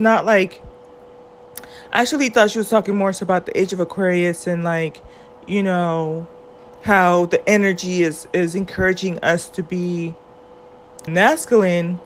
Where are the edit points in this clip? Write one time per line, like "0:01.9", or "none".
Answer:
0:11.1